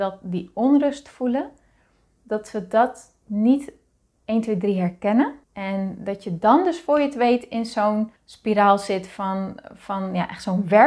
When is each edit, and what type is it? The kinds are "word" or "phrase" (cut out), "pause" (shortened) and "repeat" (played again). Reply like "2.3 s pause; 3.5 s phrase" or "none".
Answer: 5.4 s pause; 8.2 s pause